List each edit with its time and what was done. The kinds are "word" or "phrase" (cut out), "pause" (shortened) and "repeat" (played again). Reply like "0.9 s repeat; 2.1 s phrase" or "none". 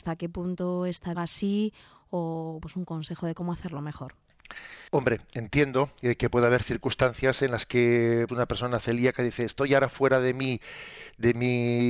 1.2 s phrase; 2.6 s word; 4.9 s pause; 8.3 s word